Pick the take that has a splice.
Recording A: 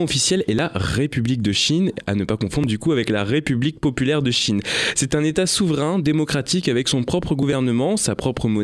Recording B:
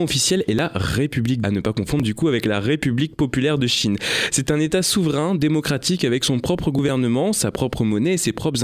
B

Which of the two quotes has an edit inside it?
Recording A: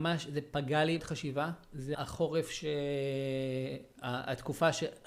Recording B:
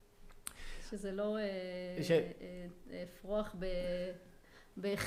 A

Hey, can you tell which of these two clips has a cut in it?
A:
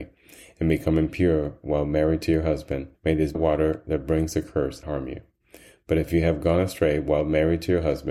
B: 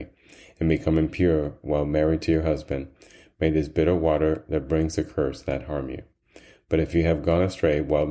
A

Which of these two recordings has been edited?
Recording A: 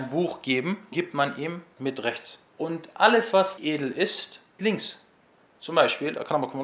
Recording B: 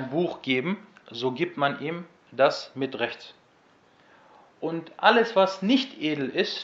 A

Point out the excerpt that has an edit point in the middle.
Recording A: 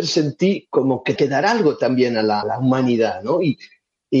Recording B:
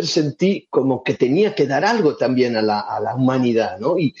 A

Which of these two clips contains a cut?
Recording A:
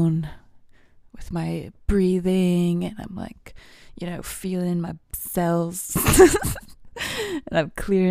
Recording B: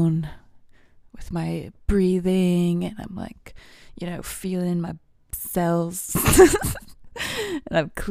A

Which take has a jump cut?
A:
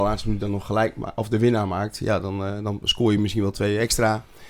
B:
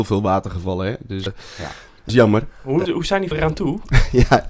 B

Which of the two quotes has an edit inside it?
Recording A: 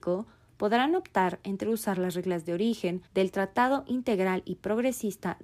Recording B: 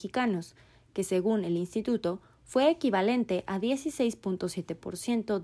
A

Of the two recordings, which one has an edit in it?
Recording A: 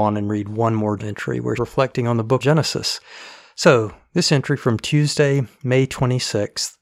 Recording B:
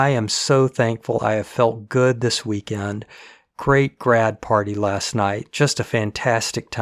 A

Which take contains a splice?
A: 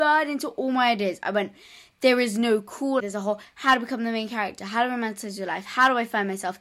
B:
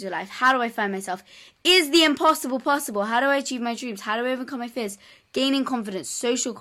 A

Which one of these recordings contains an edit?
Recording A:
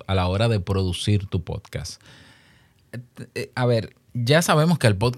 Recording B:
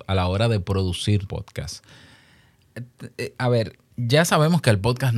B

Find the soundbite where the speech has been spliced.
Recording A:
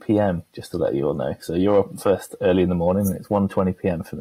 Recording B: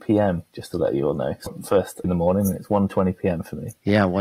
B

